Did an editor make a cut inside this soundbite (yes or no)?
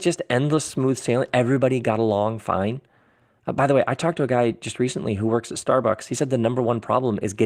no